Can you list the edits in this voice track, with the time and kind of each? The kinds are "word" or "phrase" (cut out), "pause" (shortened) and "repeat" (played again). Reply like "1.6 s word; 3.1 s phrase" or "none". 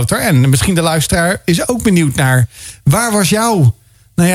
none